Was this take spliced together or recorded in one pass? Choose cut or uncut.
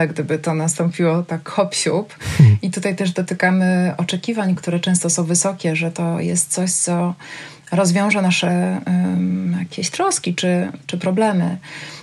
uncut